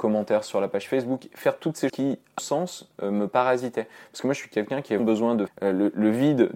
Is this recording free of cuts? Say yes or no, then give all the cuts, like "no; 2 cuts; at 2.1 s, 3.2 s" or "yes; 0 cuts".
no; 4 cuts; at 1.9 s, 2.4 s, 5.0 s, 5.5 s